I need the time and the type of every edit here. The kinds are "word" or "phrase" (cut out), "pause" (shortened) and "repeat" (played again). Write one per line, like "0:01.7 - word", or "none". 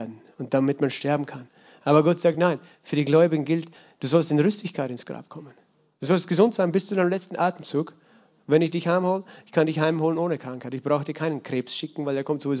none